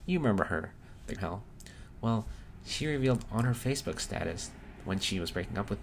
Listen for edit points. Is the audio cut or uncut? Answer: cut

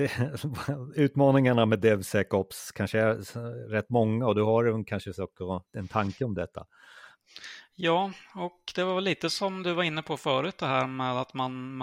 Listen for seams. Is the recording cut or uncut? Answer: cut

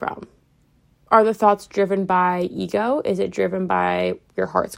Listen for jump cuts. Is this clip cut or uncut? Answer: uncut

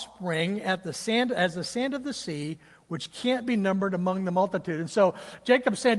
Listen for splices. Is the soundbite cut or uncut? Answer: uncut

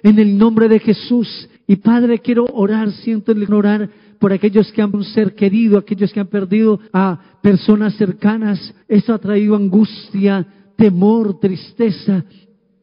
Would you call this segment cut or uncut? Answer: cut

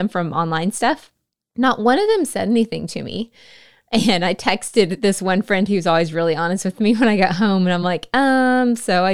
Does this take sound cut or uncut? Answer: uncut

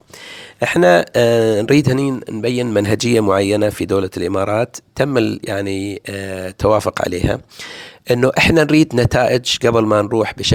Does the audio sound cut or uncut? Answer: uncut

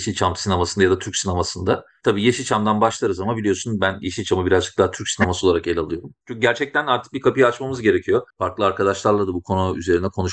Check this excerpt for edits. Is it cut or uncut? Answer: cut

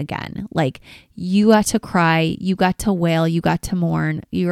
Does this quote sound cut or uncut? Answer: uncut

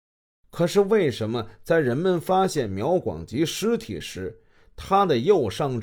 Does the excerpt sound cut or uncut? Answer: uncut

